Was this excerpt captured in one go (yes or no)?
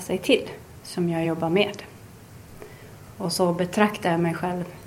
yes